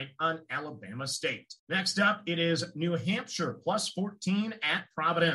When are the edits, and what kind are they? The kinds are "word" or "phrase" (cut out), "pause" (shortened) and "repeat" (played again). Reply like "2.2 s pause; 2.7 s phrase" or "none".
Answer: 1.6 s pause